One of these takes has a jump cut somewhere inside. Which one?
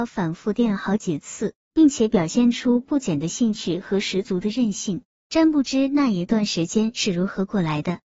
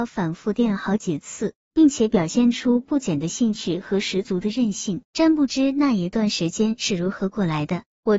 second; 1 cut; at 5.0 s

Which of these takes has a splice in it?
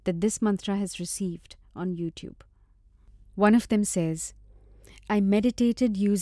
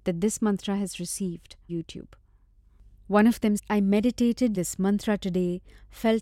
second; 3 cuts; at 1.7 s, 3.6 s, 4.5 s

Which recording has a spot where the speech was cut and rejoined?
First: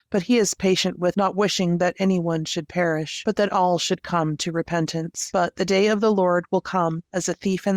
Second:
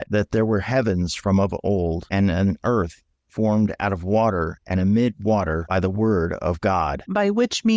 first; 1 cut; at 1.1 s

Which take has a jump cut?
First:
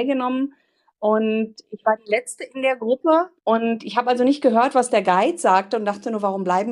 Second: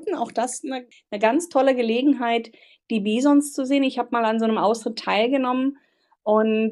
first; 1 cut; at 3.4 s

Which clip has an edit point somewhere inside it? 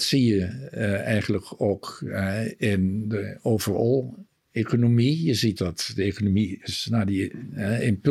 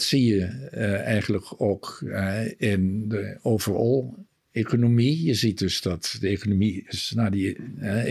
first; 1 cut; at 5.6 s

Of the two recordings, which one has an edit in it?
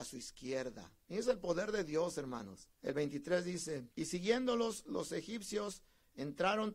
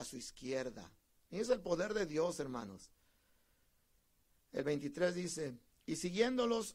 first; 3 cuts; at 1.0 s, 2.7 s, 3.9 s

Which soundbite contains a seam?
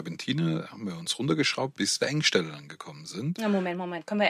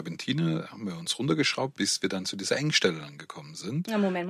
first; 1 cut; at 2.0 s

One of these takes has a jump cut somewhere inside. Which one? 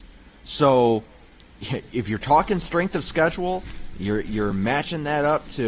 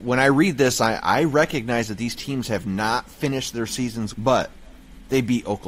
second; 1 cut; at 4.1 s

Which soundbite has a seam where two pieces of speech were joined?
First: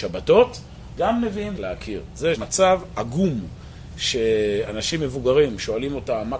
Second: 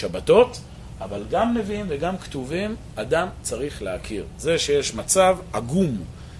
first; 3 cuts; at 1.0 s, 1.6 s, 2.3 s

